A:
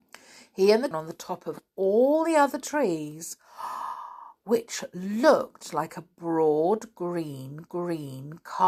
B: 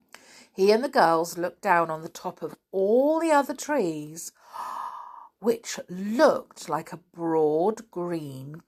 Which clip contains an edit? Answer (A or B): A